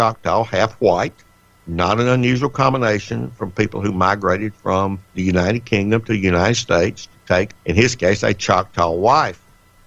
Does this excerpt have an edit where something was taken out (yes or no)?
yes